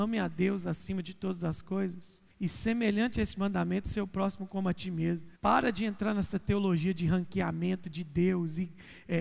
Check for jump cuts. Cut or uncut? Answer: cut